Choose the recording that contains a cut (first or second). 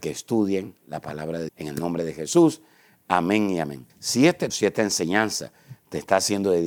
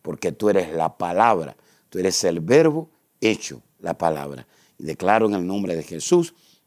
first